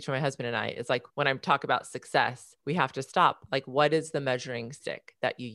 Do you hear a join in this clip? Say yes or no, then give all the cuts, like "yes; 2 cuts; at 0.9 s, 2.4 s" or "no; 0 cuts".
yes; 2 cuts; at 1.1 s, 2.6 s